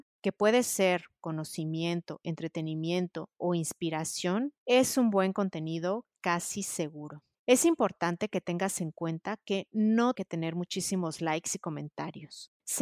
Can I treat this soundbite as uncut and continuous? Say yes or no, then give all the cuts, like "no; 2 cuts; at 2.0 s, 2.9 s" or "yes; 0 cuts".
no; 1 cut; at 10.1 s